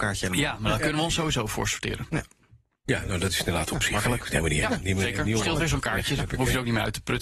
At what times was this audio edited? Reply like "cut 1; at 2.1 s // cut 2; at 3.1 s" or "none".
none